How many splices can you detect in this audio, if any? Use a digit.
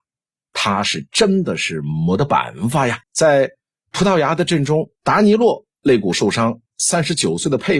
3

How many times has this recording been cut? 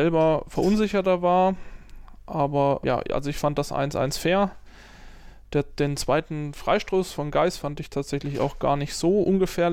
1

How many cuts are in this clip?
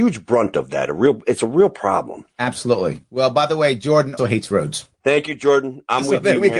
2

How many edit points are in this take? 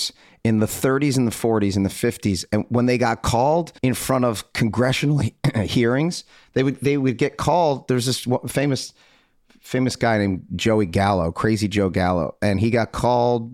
1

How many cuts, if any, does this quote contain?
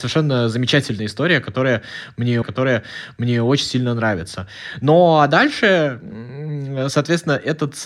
1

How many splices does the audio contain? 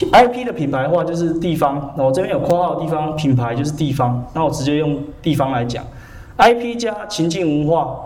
0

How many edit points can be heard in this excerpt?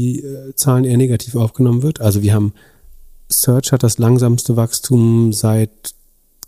0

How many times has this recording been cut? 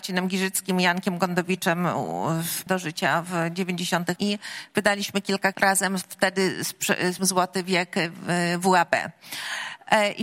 4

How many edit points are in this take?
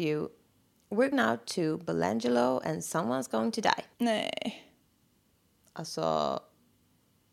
2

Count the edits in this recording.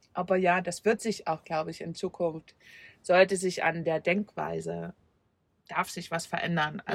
0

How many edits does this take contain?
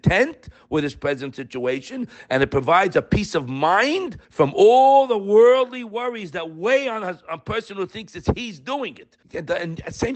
2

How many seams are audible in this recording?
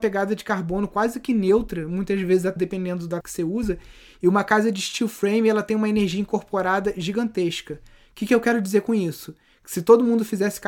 2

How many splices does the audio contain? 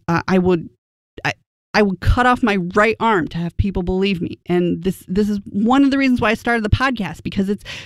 0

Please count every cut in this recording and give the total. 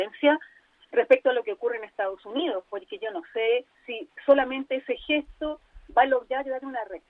1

